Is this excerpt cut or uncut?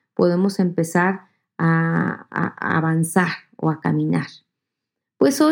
uncut